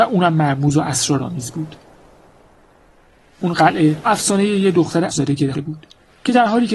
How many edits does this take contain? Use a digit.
3